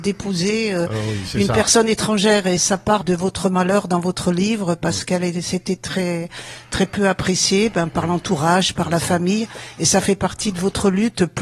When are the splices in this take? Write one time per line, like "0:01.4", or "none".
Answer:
0:02.6
0:03.0